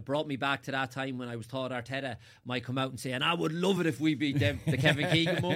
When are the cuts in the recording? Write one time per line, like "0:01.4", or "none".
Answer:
none